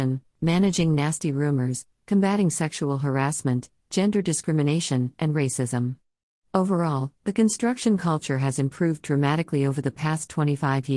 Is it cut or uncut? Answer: uncut